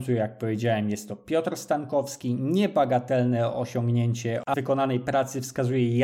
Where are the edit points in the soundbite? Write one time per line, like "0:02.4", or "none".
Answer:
0:04.5

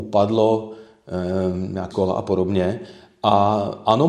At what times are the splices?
0:01.9

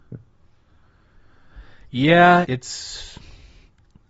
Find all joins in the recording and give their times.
0:02.4

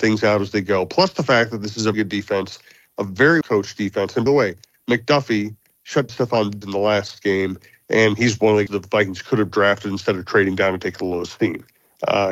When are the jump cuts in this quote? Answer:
0:01.9
0:03.4
0:04.3
0:06.1
0:06.6
0:08.7

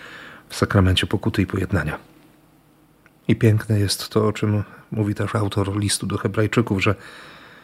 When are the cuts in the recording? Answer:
none

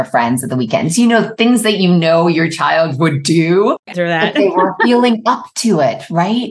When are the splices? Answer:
0:03.9

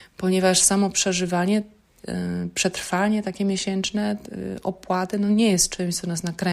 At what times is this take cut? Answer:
none

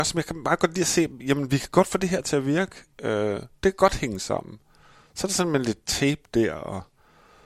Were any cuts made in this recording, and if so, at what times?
none

